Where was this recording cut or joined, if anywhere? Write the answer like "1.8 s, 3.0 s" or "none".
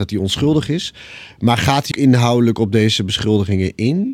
1.9 s

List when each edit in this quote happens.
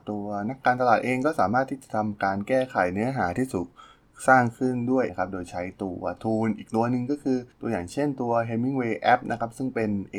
5.1 s, 7.5 s

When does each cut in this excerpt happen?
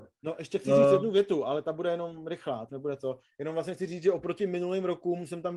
2.7 s

